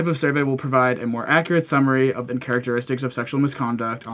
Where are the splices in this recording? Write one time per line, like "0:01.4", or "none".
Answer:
0:02.3